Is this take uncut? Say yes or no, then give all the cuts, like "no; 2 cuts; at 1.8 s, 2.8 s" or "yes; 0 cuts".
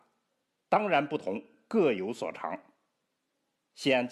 yes; 0 cuts